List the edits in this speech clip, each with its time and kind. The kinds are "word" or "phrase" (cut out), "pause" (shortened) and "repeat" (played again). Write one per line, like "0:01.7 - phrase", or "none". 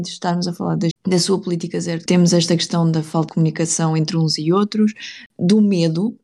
0:00.9 - word
0:02.1 - word
0:03.3 - word